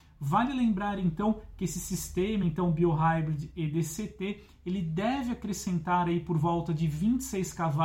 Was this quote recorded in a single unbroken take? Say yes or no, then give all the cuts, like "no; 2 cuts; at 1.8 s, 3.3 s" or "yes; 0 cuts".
yes; 0 cuts